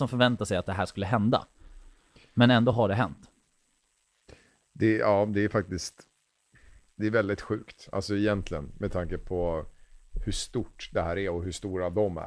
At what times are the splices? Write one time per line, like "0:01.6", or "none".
none